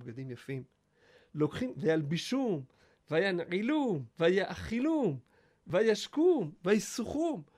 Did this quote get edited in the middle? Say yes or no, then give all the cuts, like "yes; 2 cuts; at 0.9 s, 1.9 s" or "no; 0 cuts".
yes; 1 cut; at 4.1 s